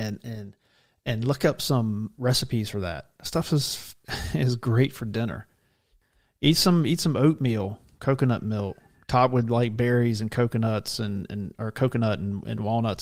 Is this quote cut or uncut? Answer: uncut